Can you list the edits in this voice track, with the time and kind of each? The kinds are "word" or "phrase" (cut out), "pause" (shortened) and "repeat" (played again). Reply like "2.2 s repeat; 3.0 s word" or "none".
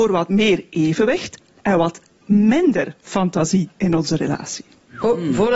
none